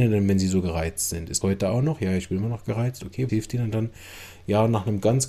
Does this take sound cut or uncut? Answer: cut